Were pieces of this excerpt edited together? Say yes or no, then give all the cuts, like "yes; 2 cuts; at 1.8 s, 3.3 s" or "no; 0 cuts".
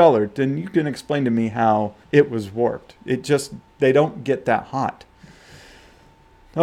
yes; 1 cut; at 2.0 s